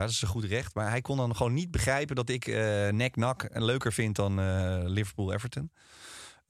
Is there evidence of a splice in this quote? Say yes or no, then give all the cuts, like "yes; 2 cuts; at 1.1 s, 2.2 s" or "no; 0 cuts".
no; 0 cuts